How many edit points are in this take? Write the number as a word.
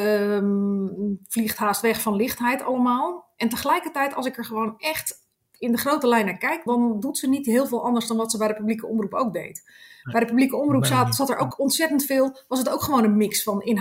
two